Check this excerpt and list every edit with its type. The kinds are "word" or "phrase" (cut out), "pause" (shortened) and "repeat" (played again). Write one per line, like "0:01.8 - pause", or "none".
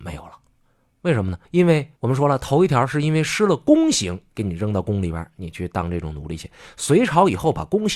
0:01.4 - pause
0:02.0 - pause

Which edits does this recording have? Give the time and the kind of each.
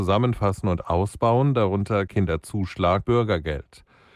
0:02.1 - word
0:03.0 - word

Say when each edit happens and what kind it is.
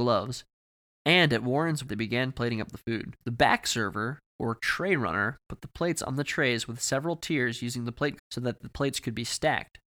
0:01.9 - word
0:03.2 - pause
0:04.3 - pause
0:08.2 - word

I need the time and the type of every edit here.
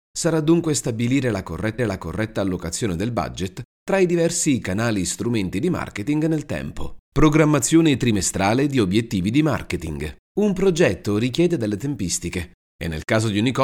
0:01.8 - repeat
0:07.0 - pause
0:10.2 - pause

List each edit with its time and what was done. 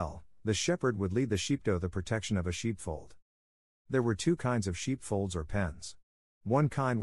none

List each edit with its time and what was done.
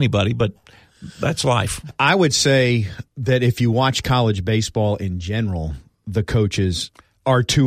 0:03.1 - pause

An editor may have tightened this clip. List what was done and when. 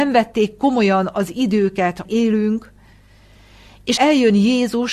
0:02.0 - word
0:04.0 - word

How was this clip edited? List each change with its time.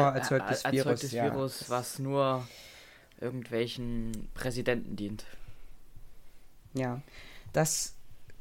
none

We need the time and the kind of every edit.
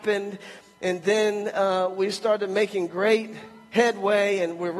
none

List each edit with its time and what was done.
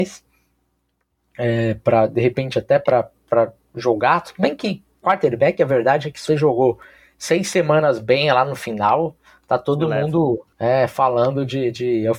0:06.3 - word
0:10.5 - pause

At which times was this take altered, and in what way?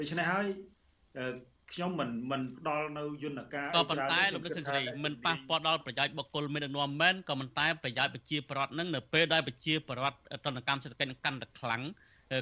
none

